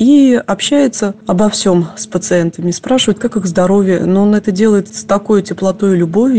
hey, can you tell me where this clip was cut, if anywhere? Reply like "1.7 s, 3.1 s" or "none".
none